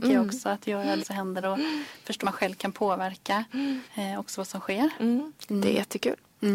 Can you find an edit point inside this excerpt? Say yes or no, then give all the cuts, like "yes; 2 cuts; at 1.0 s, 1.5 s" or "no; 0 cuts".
yes; 4 cuts; at 1.0 s, 1.4 s, 2.2 s, 3.8 s